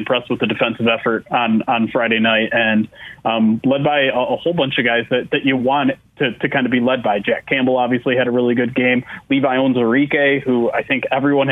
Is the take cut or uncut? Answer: uncut